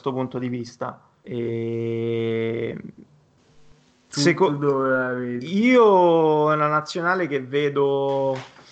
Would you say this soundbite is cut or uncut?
uncut